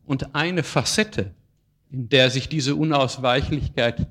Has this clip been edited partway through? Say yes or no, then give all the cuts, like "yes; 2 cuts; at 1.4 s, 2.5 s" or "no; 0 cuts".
no; 0 cuts